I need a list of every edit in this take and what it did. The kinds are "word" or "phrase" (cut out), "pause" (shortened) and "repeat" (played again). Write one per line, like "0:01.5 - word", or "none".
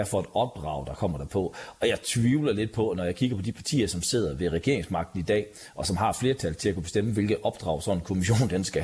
none